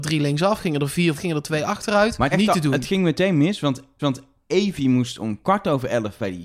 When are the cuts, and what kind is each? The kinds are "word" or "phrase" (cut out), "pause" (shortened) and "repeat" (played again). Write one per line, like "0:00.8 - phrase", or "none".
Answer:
0:01.2 - word
0:02.3 - phrase
0:04.0 - repeat